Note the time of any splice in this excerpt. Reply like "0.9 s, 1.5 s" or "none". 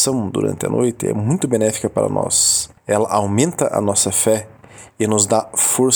2.8 s